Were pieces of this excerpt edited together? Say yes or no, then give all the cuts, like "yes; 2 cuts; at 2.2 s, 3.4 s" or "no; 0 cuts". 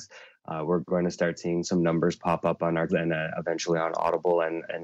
yes; 2 cuts; at 1.6 s, 2.9 s